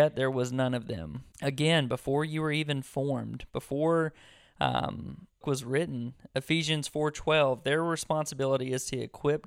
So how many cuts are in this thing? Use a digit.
2